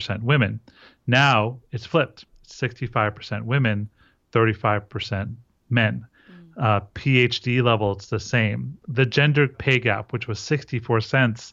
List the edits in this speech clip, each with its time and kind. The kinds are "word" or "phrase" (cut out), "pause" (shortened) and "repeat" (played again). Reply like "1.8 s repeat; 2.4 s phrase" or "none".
9.5 s word